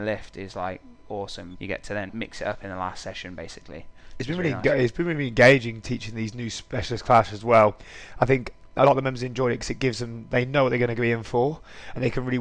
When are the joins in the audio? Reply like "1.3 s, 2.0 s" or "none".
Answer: 1.5 s, 2.1 s